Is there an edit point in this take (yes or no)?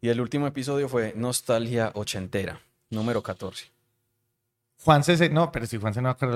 no